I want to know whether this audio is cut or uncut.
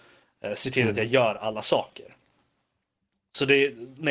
uncut